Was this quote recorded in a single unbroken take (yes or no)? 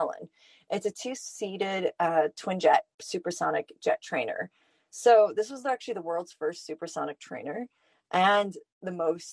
yes